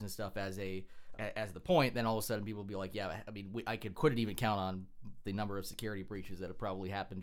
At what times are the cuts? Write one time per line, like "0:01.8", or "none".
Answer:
0:01.1
0:03.9
0:05.2